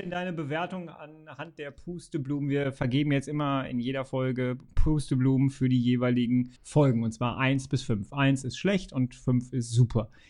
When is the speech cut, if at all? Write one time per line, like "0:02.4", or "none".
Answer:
0:06.6